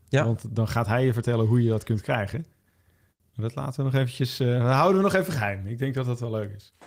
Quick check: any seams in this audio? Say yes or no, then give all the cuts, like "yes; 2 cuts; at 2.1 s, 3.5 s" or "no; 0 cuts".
no; 0 cuts